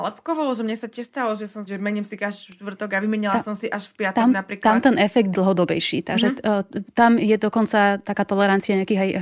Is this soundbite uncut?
no; 2 cuts; at 1.7 s, 5.3 s

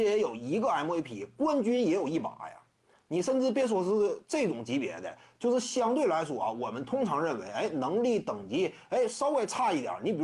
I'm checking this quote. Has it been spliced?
no; 0 cuts

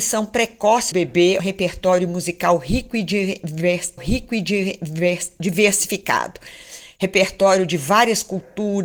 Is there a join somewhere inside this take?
yes; 3 cuts; at 0.9 s, 1.4 s, 4.0 s

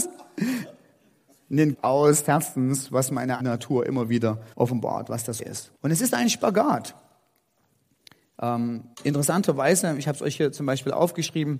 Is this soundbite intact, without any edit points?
no; 7 cuts; at 1.7 s, 2.3 s, 3.4 s, 4.5 s, 5.4 s, 5.8 s, 8.9 s

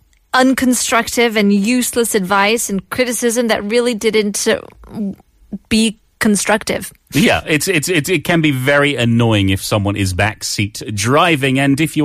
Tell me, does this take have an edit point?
no; 0 cuts

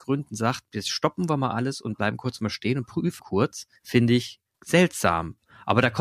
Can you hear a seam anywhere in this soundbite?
yes; 3 cuts; at 3.2 s, 3.8 s, 4.5 s

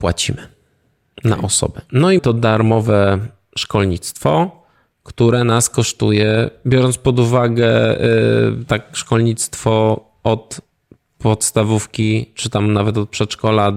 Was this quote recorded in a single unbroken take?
no; 1 cut; at 2.2 s

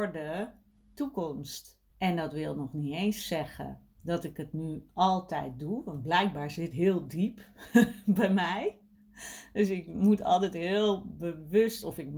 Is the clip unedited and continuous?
no; 3 cuts; at 1.9 s, 3.9 s, 6.7 s

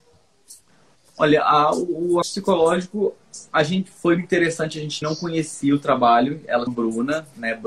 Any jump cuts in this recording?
yes; 4 cuts; at 2.2 s, 4.2 s, 5.0 s, 6.7 s

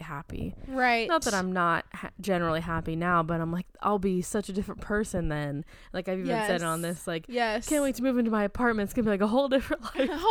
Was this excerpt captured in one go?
yes; 0 cuts

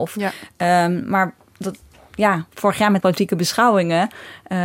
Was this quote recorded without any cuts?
no; 1 cut; at 3.0 s

